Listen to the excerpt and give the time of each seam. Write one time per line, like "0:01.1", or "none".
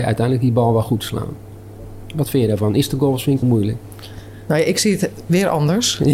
0:03.4